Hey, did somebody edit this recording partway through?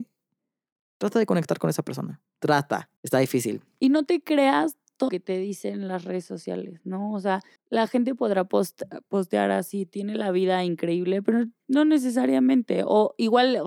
yes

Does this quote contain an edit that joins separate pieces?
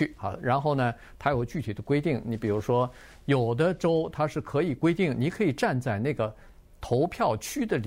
no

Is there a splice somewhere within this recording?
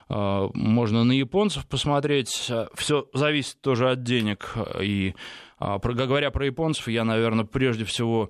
no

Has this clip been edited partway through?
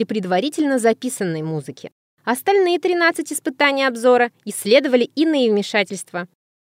no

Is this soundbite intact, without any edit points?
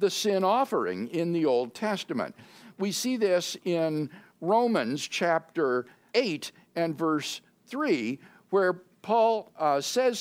no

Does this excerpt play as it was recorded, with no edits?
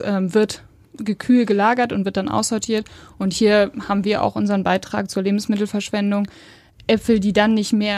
yes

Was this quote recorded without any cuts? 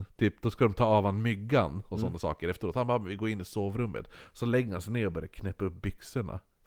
yes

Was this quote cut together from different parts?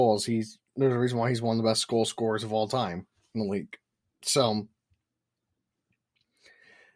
no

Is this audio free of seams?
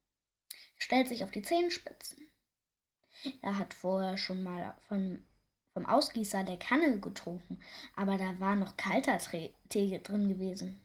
yes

